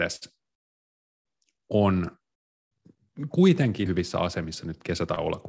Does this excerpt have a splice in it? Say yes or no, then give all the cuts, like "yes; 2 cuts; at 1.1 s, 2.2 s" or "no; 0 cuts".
yes; 1 cut; at 3.9 s